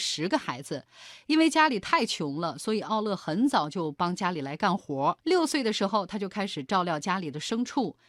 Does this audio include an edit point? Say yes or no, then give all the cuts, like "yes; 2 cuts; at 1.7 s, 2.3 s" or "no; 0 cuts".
yes; 1 cut; at 5.2 s